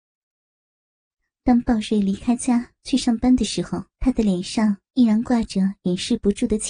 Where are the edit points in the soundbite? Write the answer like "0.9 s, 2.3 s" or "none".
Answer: 3.9 s